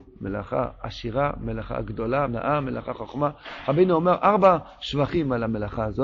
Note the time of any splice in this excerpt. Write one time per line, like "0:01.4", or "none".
0:02.3